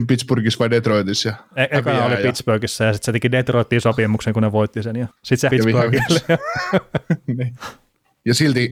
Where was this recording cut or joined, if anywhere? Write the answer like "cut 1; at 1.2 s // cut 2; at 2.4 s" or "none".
cut 1; at 5.2 s // cut 2; at 5.5 s